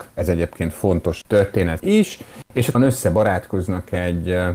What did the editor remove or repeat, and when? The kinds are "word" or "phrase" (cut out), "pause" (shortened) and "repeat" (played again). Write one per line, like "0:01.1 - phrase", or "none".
0:01.2 - word
0:01.8 - word
0:02.7 - word

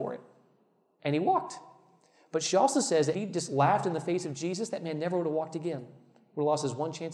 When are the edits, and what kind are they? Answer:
0:03.1 - phrase

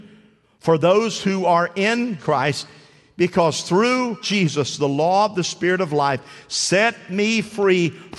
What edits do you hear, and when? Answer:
0:02.2 - word
0:04.2 - word

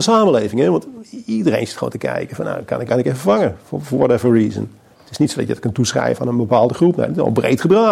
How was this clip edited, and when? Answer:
0:02.9 - word

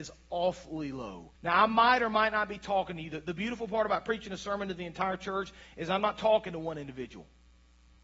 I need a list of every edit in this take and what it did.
0:01.3 - pause

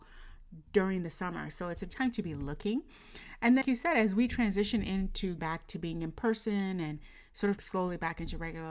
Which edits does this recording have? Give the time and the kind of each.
0:01.9 - word
0:03.6 - word
0:05.4 - word
0:07.6 - word

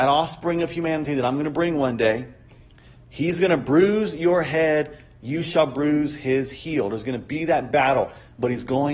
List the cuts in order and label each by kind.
none

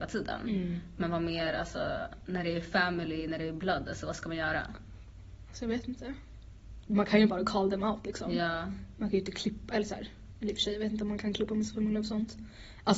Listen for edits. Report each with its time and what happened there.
none

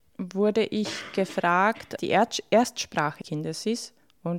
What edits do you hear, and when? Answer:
0:02.0 - word
0:03.2 - word

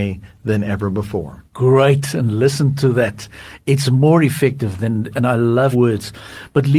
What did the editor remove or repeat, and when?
0:01.5 - pause
0:05.1 - word
0:05.7 - word

